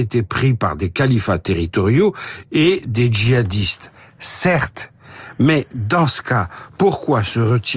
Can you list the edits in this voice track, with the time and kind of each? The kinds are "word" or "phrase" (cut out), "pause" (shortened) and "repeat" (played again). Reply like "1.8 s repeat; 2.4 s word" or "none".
none